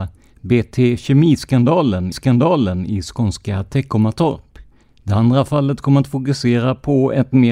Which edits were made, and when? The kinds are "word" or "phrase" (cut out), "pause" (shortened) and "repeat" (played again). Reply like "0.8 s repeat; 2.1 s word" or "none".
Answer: 2.1 s repeat; 4.8 s pause